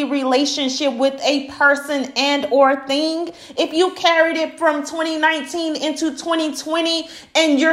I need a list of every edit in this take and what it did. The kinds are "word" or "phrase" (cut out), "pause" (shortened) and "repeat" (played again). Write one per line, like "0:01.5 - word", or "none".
none